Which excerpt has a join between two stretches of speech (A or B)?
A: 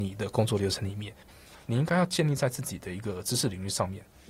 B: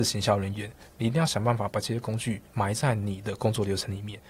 B